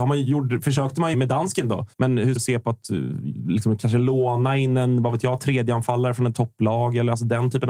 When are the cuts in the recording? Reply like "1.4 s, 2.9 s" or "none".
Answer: 1.1 s, 1.9 s, 2.4 s, 6.3 s